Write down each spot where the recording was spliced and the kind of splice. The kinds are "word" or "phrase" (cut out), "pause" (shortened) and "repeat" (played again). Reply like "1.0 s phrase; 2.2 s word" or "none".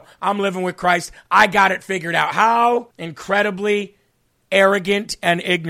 2.9 s pause